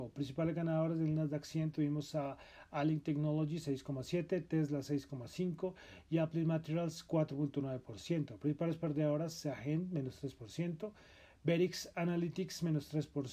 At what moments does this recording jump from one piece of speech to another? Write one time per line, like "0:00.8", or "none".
none